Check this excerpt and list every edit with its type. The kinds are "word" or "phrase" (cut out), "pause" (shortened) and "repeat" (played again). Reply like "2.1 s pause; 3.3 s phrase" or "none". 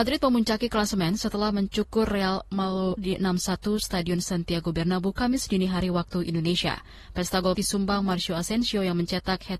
3.0 s word; 7.5 s word